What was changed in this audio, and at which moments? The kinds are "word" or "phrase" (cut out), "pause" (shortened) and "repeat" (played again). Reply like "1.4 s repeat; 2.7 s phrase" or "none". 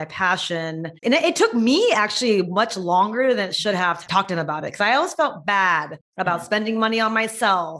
1.0 s pause; 6.1 s pause

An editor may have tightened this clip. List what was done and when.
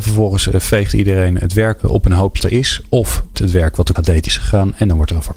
1.8 s word; 2.4 s word; 3.3 s word; 4.0 s word; 4.3 s word

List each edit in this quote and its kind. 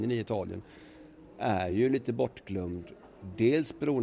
none

